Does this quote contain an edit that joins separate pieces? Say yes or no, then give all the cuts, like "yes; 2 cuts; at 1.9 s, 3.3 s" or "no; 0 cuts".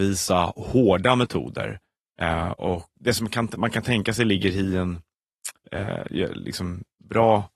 yes; 1 cut; at 2.9 s